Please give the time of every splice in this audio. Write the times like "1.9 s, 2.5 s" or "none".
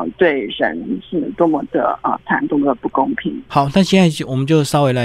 2.5 s

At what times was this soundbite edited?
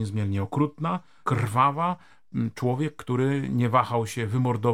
1.2 s

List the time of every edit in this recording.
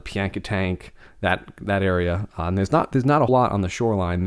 3.3 s

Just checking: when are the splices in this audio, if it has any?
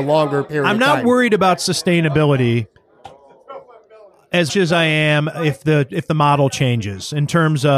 4.5 s

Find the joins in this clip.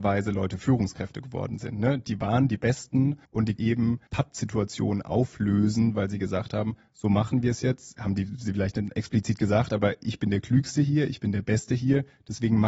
3.2 s, 3.6 s, 4.1 s

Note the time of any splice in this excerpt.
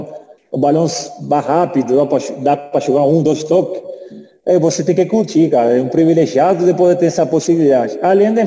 none

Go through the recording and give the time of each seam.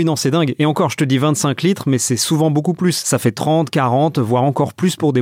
none

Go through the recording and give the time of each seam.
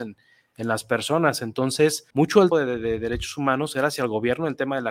2.1 s, 2.5 s

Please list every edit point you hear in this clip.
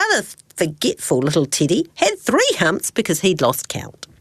none

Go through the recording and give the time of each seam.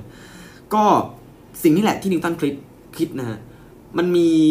none

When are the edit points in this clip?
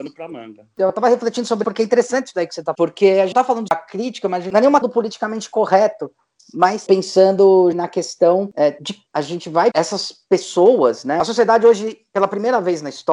1.6 s, 2.7 s, 3.3 s, 3.7 s, 4.8 s, 6.9 s, 7.7 s, 9.1 s, 9.7 s

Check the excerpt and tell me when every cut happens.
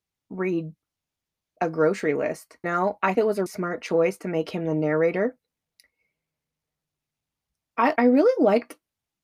2.6 s, 3.1 s, 3.5 s, 8.0 s

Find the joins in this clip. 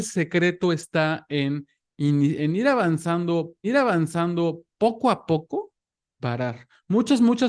2.4 s, 3.6 s, 6.2 s

